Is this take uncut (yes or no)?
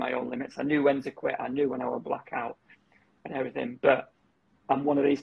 yes